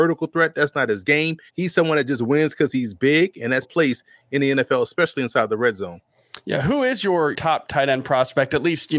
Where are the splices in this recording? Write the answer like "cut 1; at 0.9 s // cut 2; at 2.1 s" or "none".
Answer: cut 1; at 1.5 s // cut 2; at 3.6 s // cut 3; at 7.3 s